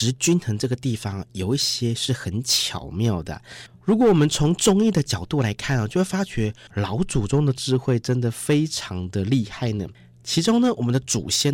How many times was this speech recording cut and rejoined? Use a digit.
1